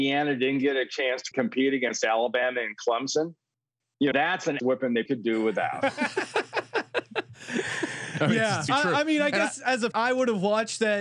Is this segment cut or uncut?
cut